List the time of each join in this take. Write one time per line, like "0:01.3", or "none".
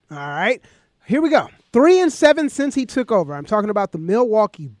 0:01.6